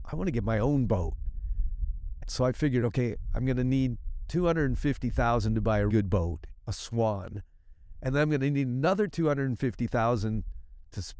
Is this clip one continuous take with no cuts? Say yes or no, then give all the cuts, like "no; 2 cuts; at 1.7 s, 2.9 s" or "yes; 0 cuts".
no; 2 cuts; at 2.2 s, 5.9 s